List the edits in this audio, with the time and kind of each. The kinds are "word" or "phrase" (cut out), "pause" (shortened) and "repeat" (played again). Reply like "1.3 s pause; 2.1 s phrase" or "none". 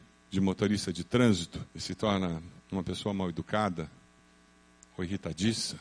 1.7 s pause; 2.6 s pause